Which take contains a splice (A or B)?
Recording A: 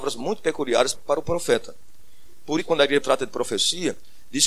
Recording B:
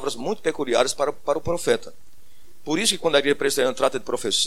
A